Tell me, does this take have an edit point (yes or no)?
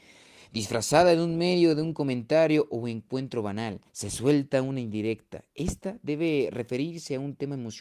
yes